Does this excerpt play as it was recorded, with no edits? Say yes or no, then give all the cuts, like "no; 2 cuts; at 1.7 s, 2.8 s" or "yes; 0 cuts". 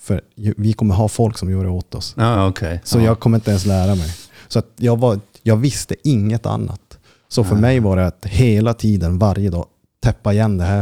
yes; 0 cuts